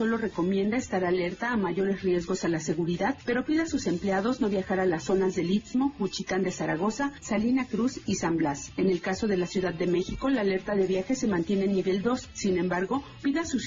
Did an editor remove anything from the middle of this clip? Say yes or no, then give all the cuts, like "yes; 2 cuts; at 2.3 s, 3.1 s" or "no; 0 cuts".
no; 0 cuts